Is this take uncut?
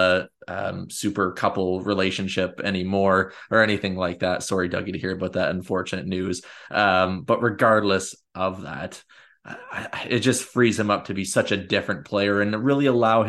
yes; 0 cuts

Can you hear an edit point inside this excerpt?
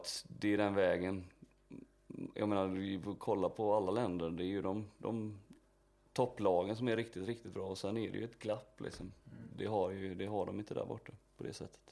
no; 0 cuts

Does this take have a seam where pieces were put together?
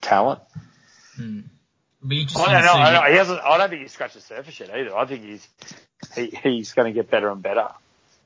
no; 0 cuts

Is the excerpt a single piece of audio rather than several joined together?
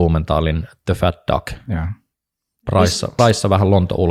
no; 1 cut; at 3.2 s

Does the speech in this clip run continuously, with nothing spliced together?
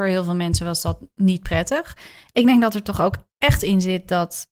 yes; 0 cuts

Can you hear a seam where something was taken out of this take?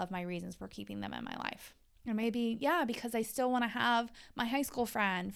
no; 0 cuts

